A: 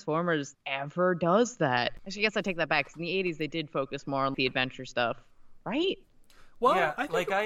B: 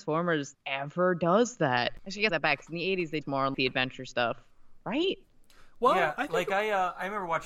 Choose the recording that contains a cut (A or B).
B